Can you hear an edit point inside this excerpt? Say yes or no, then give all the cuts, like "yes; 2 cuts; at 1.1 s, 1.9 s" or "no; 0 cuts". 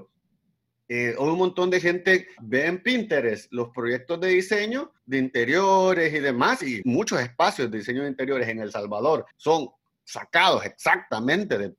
yes; 4 cuts; at 2.4 s, 5.0 s, 6.8 s, 9.3 s